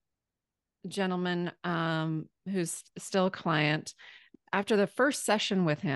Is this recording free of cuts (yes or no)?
yes